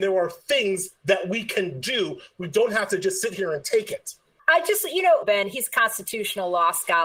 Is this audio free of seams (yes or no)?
no